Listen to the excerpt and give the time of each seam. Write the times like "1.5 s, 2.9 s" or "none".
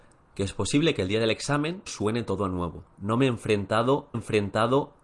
1.9 s, 4.1 s